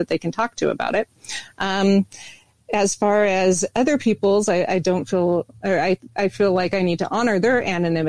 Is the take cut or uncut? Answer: uncut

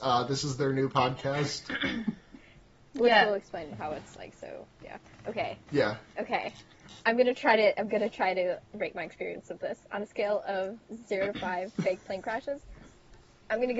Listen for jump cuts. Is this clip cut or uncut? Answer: uncut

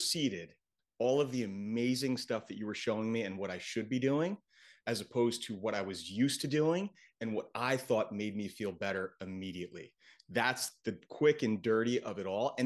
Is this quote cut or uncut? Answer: uncut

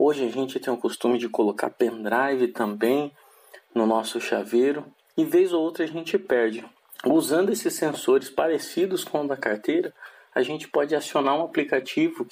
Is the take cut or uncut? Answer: uncut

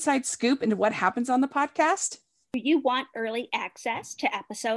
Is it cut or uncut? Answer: uncut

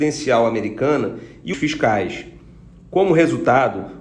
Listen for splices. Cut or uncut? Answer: cut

